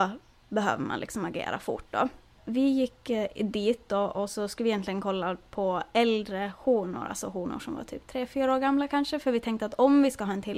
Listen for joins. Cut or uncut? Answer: uncut